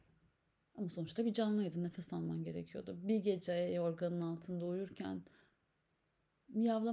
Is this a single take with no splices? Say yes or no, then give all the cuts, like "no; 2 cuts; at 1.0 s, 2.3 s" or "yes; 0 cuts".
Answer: yes; 0 cuts